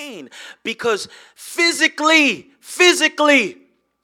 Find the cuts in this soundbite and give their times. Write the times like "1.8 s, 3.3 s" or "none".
none